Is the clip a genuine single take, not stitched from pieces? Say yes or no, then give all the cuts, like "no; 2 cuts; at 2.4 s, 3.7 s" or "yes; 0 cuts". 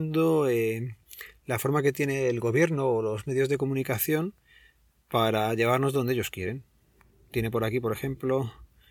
yes; 0 cuts